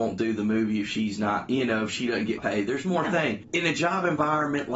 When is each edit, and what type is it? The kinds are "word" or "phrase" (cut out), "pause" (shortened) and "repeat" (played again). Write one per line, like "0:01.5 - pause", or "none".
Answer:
0:02.4 - word